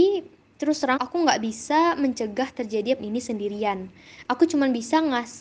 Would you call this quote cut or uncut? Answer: cut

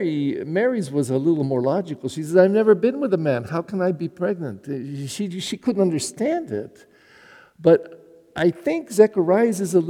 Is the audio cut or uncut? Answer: uncut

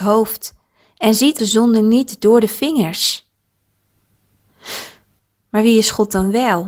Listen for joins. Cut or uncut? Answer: cut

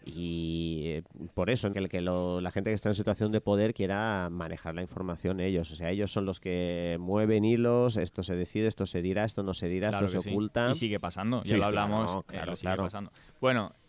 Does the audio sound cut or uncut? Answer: cut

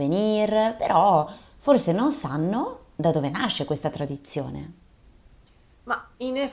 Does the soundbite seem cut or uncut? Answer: uncut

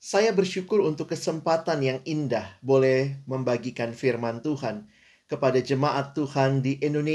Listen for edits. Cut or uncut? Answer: uncut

